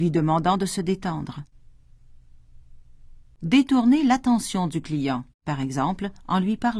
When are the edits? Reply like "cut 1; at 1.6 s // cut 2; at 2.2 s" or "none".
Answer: cut 1; at 5.3 s

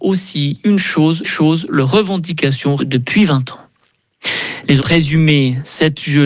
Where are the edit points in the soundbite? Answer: cut 1; at 1.2 s // cut 2; at 2.8 s // cut 3; at 4.8 s

